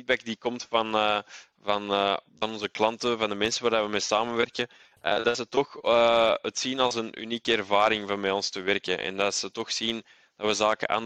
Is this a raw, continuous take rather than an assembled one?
yes; 0 cuts

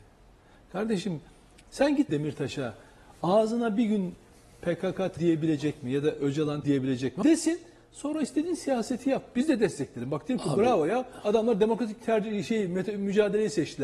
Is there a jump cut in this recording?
yes; 4 cuts; at 2.1 s, 5.2 s, 6.6 s, 7.2 s

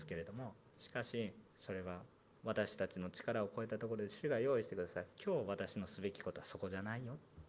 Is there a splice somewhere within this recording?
yes; 2 cuts; at 1.5 s, 2.1 s

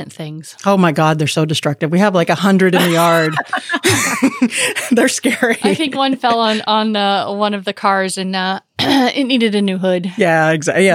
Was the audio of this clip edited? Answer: no; 0 cuts

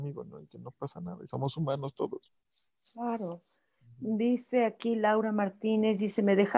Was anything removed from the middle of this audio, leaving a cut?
no; 0 cuts

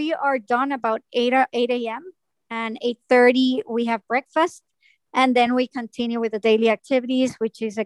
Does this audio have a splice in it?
no; 0 cuts

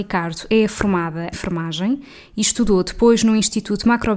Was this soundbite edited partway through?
yes; 1 cut; at 1.3 s

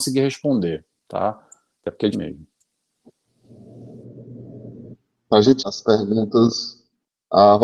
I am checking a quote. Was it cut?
yes; 2 cuts; at 2.1 s, 5.6 s

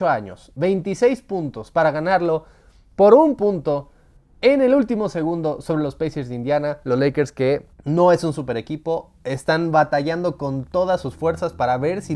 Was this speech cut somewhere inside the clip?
yes; 1 cut; at 7.7 s

